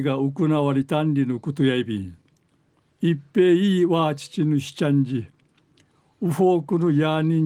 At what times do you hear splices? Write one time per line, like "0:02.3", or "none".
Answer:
0:02.3